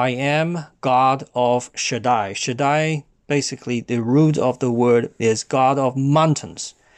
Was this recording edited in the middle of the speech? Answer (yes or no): no